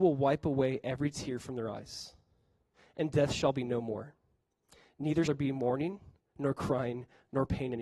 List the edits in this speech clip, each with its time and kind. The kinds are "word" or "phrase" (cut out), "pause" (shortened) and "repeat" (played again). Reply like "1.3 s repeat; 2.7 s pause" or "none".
5.3 s word

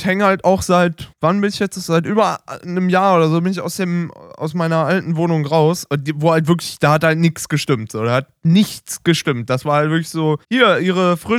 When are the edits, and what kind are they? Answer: 1.1 s pause; 10.4 s pause

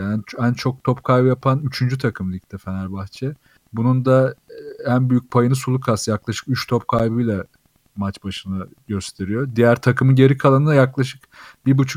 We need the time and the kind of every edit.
none

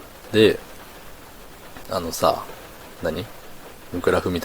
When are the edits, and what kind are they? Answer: none

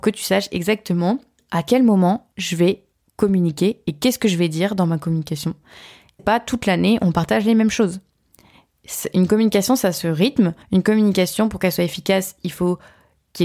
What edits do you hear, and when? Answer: 1.4 s word; 2.3 s pause; 2.9 s pause; 6.2 s phrase; 10.6 s pause

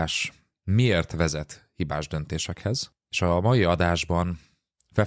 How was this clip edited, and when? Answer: none

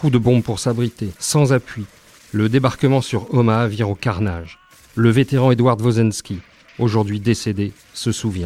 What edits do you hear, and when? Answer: 1.2 s pause

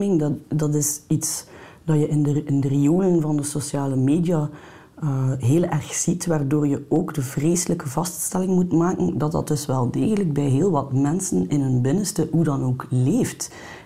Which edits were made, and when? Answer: none

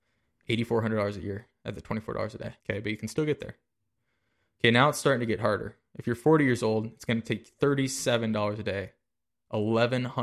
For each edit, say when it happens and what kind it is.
2.6 s pause

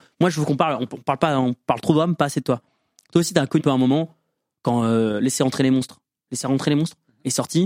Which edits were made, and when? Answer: 3.6 s word

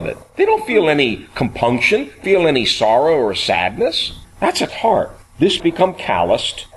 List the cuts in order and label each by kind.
2.2 s word; 4.7 s word; 5.6 s phrase

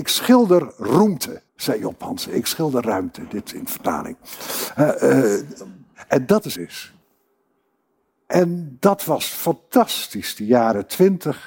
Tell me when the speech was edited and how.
1.5 s pause; 6.6 s phrase

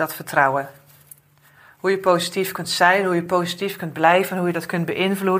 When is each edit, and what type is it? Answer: none

